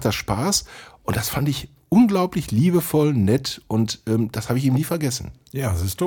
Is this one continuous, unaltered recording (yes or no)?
yes